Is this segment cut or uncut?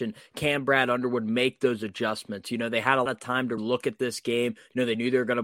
cut